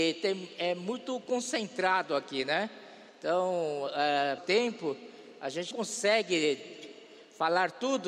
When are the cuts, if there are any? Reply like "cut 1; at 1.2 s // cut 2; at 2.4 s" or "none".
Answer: cut 1; at 3.1 s // cut 2; at 4.4 s // cut 3; at 5.7 s